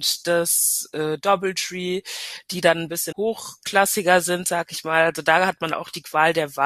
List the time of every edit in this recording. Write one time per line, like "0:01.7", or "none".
0:03.1